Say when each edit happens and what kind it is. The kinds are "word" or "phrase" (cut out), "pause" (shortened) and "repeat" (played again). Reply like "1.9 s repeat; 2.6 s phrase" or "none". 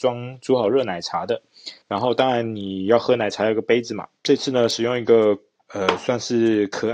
1.8 s pause; 4.2 s pause; 5.6 s phrase